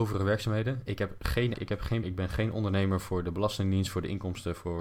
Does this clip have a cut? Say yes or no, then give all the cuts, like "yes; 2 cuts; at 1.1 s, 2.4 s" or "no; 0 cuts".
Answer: yes; 2 cuts; at 1.5 s, 2.0 s